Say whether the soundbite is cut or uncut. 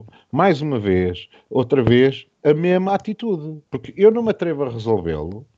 cut